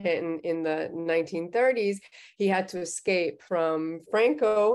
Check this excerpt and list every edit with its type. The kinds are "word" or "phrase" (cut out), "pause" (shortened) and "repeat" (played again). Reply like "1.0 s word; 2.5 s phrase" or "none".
3.5 s word